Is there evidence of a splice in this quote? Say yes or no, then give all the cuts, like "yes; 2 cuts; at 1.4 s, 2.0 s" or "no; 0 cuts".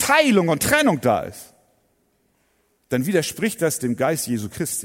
no; 0 cuts